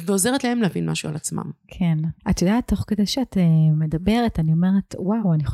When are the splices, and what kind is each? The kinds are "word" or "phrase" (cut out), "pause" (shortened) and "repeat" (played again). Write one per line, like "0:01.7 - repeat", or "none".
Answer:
0:02.2 - pause